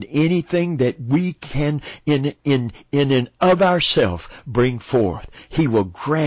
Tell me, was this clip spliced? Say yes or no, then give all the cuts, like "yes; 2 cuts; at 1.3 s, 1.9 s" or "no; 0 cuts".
no; 0 cuts